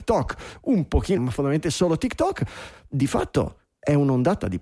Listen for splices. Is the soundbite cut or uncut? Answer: cut